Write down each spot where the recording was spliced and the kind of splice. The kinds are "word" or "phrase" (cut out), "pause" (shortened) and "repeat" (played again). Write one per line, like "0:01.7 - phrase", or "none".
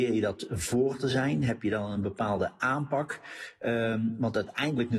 none